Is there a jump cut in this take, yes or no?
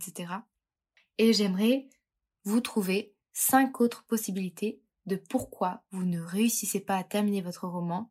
no